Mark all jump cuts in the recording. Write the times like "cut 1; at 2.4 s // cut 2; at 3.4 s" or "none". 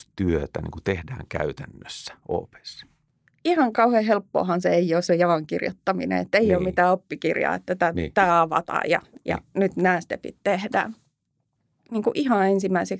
cut 1; at 5.1 s

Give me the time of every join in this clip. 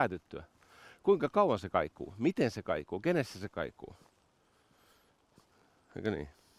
none

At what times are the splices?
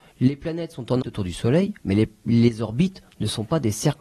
cut 1; at 1.0 s // cut 2; at 1.8 s

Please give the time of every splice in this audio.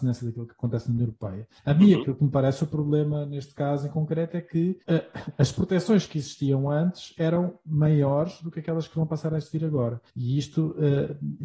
cut 1; at 1.6 s // cut 2; at 4.8 s // cut 3; at 10.1 s

